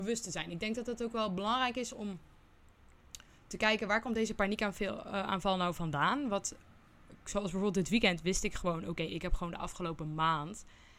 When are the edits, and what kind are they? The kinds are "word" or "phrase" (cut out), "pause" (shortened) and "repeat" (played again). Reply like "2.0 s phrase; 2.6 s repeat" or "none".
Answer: none